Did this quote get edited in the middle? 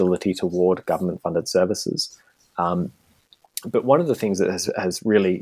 no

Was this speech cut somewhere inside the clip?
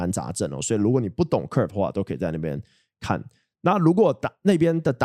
no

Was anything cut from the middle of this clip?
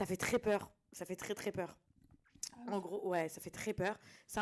no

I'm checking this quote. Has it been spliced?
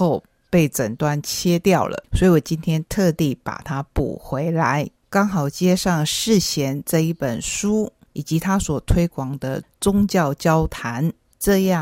yes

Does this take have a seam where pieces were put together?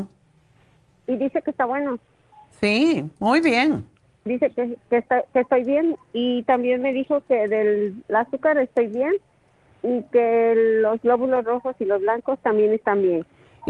no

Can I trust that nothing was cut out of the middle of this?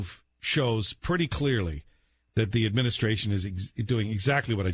yes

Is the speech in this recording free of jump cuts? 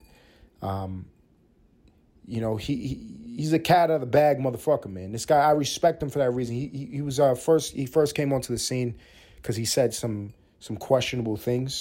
yes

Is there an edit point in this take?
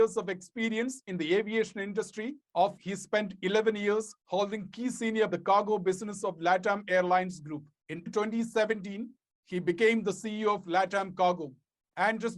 yes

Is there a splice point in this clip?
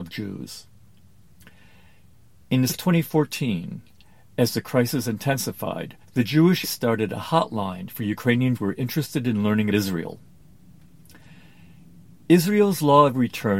yes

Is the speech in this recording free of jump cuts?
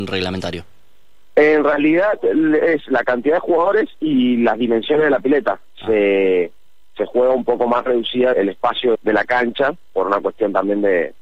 no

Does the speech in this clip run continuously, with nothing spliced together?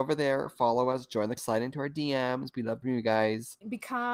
no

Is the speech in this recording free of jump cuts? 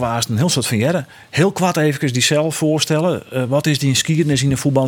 yes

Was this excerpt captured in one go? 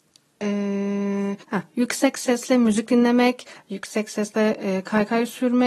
no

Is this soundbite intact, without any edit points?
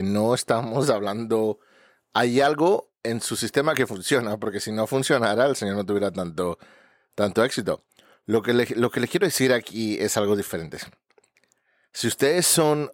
yes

